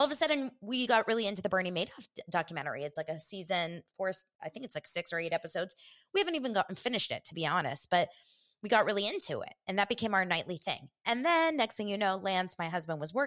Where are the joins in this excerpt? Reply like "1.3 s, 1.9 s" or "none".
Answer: 4.3 s